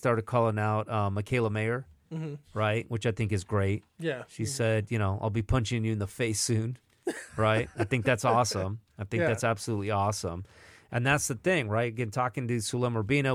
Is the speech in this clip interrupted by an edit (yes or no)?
no